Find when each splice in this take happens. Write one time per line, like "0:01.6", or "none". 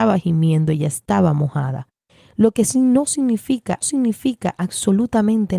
0:03.8